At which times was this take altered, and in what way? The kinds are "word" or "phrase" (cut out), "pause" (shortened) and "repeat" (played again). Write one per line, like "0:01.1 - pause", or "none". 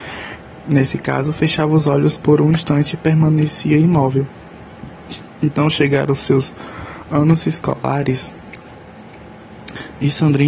none

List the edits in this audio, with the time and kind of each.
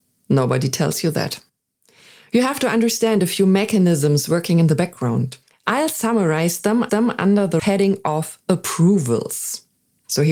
0:05.4 - pause
0:06.9 - repeat
0:07.6 - word
0:08.4 - pause

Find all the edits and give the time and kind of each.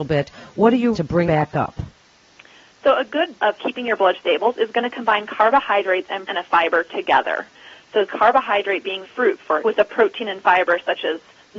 0:00.9 - word
0:01.3 - word
0:03.4 - word
0:04.1 - word
0:06.3 - word
0:08.1 - word
0:09.0 - word
0:09.6 - word

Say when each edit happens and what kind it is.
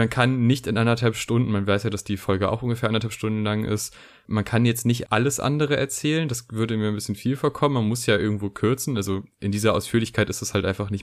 0:05.0 - word

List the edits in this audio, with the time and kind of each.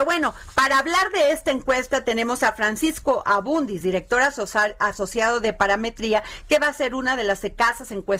none

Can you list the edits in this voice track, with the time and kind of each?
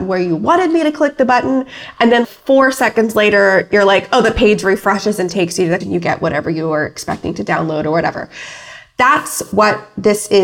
0:02.2 - word
0:05.8 - phrase

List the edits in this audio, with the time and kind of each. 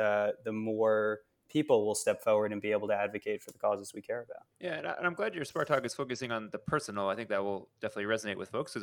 0:04.5 - pause

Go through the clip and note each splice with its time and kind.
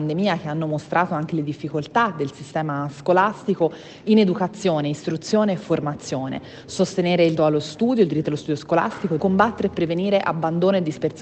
0:07.4 - word
0:09.2 - phrase

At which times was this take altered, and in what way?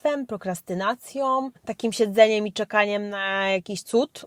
0:01.6 - pause

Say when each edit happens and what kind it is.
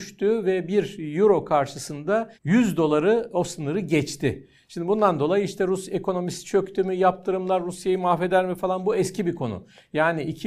0:02.4 - pause

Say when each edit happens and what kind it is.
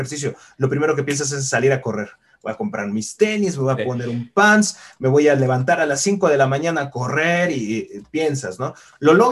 none

